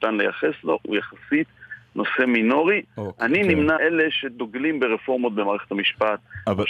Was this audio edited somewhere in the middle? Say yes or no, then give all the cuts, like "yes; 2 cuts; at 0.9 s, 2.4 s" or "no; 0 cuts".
yes; 1 cut; at 3.8 s